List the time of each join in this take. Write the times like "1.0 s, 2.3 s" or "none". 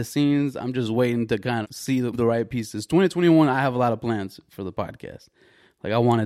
1.6 s, 2.1 s